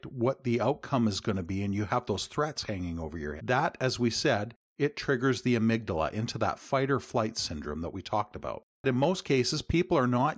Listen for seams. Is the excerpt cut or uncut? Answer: cut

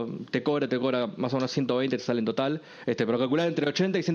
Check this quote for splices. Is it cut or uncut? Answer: uncut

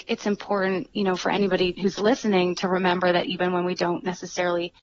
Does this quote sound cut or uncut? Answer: uncut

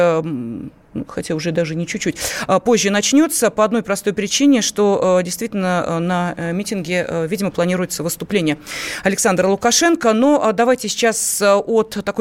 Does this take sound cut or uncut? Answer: uncut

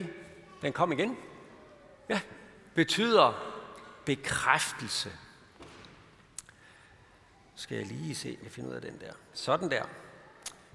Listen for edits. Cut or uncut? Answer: cut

